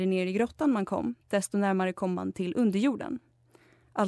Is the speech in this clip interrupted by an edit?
yes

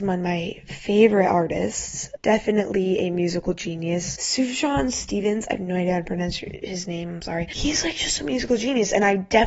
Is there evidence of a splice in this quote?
no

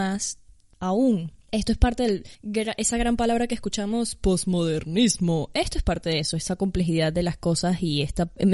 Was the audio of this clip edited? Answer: no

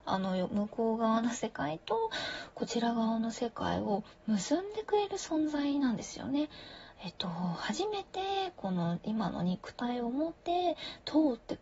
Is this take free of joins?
no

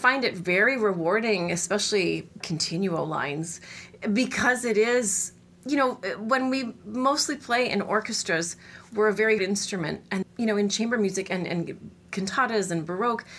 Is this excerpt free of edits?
no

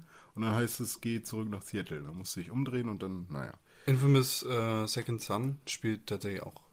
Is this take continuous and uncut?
yes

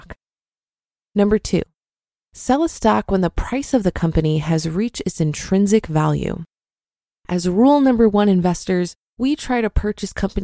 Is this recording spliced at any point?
no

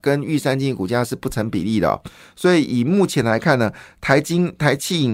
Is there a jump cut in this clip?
no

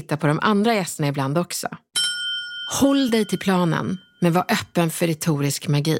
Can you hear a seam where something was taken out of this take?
no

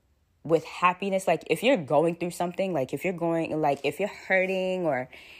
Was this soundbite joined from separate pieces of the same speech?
no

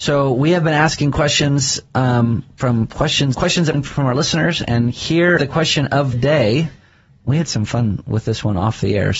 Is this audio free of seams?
no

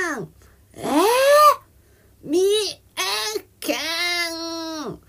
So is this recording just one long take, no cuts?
yes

